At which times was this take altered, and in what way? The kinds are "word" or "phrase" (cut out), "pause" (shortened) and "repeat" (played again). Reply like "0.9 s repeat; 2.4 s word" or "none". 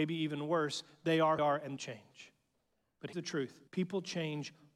1.4 s phrase; 1.8 s phrase; 3.1 s word; 3.7 s pause